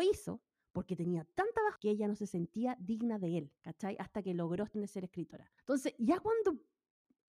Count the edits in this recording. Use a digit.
4